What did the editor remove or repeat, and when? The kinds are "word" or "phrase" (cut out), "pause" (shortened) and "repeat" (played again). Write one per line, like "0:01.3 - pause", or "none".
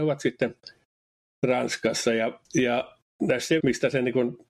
0:02.4 - pause
0:03.6 - phrase

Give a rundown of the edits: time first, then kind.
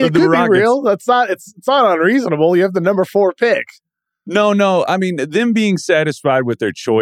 none

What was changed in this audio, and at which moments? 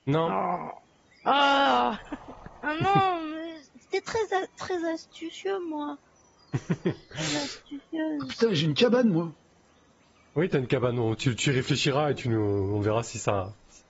none

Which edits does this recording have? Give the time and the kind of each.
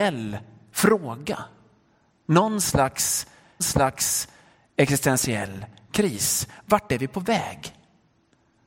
0:03.6 - repeat

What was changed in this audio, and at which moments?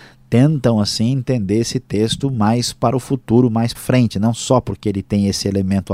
0:03.7 - word

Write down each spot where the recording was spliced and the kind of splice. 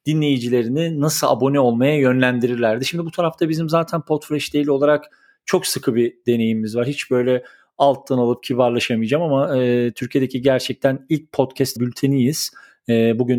0:11.8 - word

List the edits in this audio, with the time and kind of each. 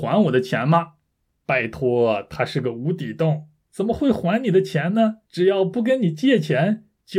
0:05.2 - pause

